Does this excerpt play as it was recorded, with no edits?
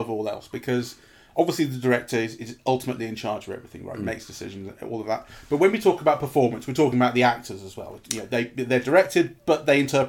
yes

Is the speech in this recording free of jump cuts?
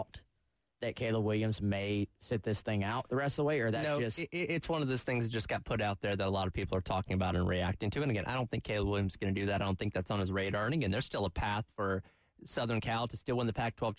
yes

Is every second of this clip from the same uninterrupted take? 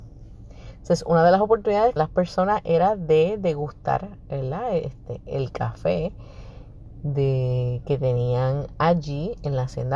no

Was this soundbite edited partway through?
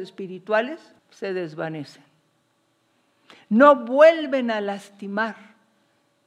yes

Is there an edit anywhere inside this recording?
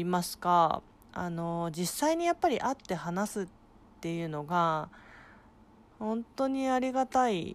no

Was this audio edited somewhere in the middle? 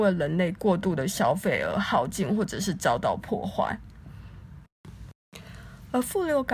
no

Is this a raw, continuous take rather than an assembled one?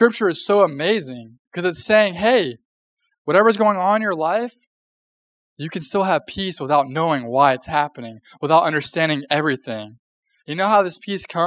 no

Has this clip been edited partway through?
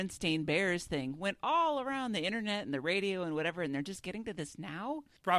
no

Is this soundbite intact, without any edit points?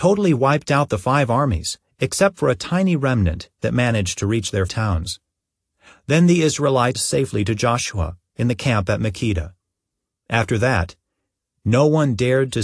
no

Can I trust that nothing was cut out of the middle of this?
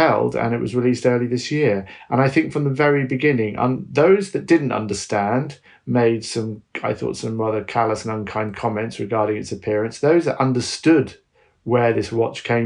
yes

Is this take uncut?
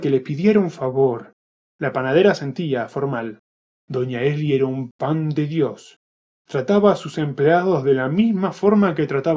yes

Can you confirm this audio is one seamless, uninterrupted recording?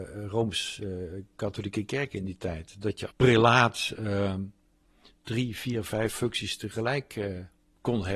no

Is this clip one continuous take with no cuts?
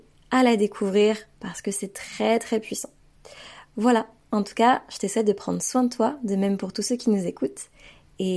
yes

